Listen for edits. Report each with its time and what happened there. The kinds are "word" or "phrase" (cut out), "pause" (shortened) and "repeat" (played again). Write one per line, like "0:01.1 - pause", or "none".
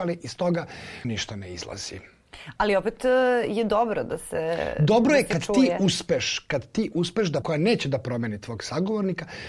0:01.0 - word
0:07.4 - phrase